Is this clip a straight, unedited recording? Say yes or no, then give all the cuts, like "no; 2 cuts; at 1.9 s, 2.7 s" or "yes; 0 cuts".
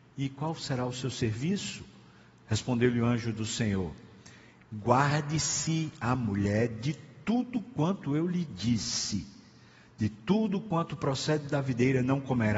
yes; 0 cuts